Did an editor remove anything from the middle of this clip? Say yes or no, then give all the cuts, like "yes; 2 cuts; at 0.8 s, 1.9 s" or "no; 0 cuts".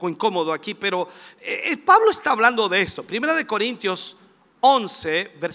no; 0 cuts